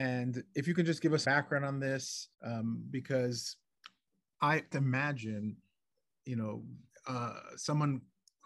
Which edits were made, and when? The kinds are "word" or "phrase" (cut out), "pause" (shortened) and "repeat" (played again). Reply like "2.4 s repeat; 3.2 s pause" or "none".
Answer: 1.2 s word; 2.3 s pause; 4.7 s phrase